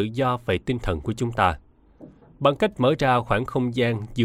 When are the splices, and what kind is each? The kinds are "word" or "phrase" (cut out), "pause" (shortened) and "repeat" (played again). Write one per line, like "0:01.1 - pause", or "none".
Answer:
none